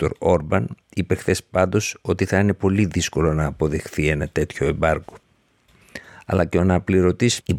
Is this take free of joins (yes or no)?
yes